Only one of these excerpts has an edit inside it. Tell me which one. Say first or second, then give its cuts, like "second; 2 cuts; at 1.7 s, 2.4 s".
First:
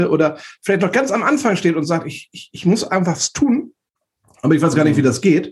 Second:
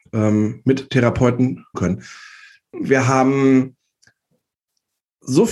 second; 1 cut; at 1.7 s